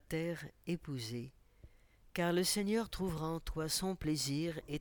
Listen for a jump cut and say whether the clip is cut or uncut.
uncut